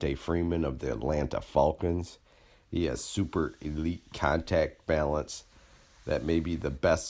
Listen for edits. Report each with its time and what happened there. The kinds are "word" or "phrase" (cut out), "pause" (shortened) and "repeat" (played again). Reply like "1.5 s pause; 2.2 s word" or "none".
none